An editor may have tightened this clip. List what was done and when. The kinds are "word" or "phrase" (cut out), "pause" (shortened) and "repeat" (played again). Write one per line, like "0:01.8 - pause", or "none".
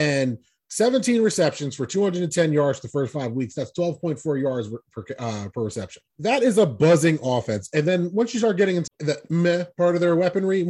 0:06.1 - pause
0:08.9 - word